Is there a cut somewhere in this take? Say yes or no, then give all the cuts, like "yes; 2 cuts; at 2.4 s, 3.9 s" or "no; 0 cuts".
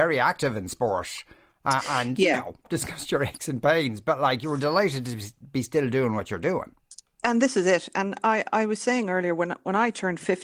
no; 0 cuts